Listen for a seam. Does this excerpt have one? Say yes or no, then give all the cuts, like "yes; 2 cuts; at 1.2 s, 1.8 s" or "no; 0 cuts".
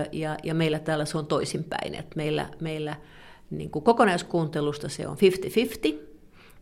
no; 0 cuts